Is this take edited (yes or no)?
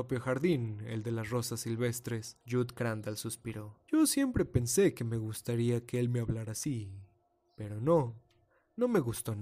yes